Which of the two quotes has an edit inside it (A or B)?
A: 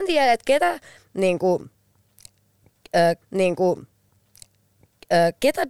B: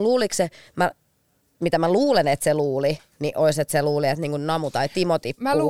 A